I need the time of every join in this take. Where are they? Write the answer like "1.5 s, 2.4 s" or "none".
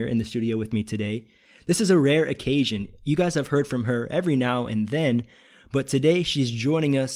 none